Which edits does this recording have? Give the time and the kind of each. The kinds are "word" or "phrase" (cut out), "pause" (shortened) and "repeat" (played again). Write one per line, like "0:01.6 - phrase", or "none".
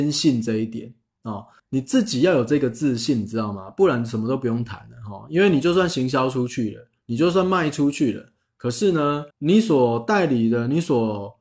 0:01.6 - pause
0:09.3 - pause